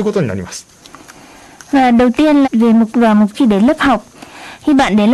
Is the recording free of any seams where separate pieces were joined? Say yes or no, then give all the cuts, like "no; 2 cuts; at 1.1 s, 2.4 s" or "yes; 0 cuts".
no; 3 cuts; at 2.4 s, 2.9 s, 3.3 s